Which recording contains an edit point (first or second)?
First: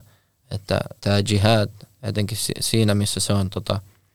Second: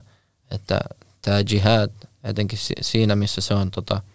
first